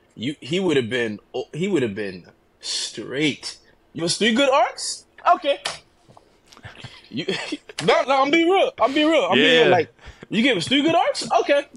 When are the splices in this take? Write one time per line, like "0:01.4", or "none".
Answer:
0:04.0
0:08.0

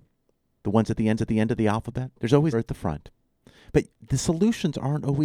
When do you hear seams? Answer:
0:01.2
0:02.2
0:02.5
0:03.9

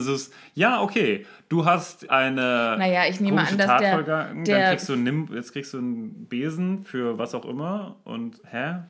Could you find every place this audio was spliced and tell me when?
0:02.1

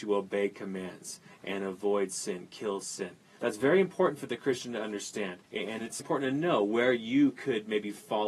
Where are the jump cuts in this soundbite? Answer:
0:03.4
0:05.4
0:06.0

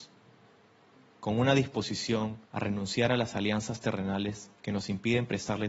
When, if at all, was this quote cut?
0:02.4
0:04.6

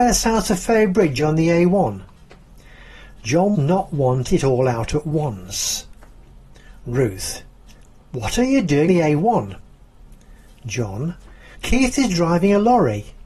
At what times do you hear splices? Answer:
0:03.5
0:04.3
0:08.9
0:11.5

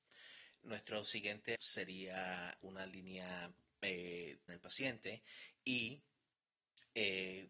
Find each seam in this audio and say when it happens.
0:01.5
0:02.6
0:04.5

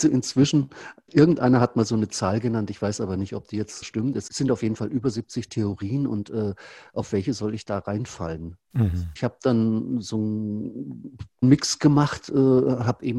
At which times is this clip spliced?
0:01.1
0:03.8

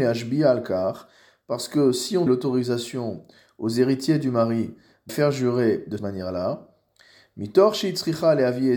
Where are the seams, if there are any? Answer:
0:02.3
0:05.1
0:06.0

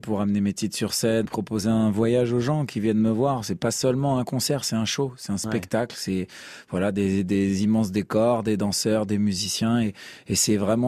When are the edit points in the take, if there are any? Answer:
0:01.3

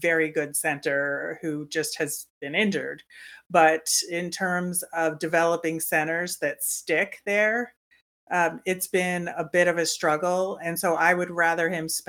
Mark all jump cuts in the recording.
none

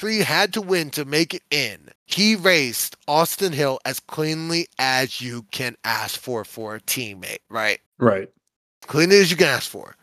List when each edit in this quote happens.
0:02.0
0:07.9

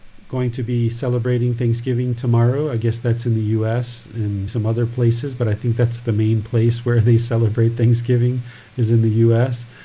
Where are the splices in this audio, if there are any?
0:04.5

